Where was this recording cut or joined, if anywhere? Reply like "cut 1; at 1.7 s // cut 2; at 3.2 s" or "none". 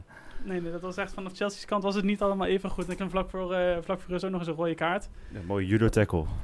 cut 1; at 3.0 s